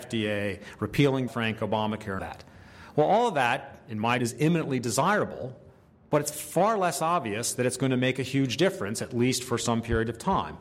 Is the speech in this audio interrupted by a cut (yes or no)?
yes